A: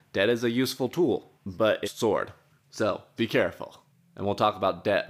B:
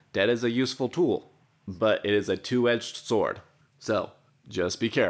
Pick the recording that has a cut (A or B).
A